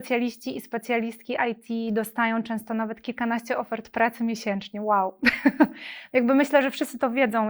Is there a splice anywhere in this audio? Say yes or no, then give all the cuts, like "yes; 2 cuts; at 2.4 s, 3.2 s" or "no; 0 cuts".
no; 0 cuts